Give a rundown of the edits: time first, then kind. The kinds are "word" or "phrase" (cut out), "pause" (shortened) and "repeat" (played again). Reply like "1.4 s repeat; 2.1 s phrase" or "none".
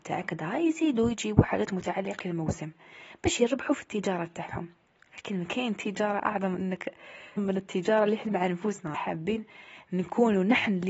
2.2 s word; 7.4 s word; 8.3 s word; 8.9 s word